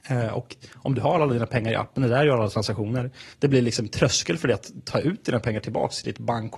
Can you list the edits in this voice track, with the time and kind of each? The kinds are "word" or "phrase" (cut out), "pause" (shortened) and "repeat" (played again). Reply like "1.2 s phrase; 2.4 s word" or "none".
3.3 s pause